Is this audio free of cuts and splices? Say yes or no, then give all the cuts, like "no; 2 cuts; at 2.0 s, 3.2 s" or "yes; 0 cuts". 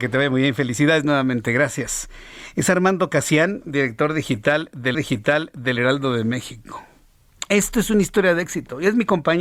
no; 1 cut; at 4.9 s